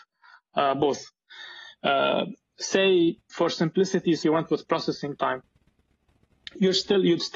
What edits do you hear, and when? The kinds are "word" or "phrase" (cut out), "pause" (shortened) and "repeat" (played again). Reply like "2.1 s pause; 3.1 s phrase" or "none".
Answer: 4.2 s word